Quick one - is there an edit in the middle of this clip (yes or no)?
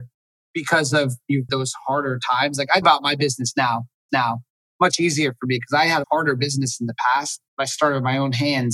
yes